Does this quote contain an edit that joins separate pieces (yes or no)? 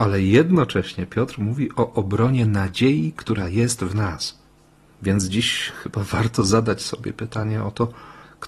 no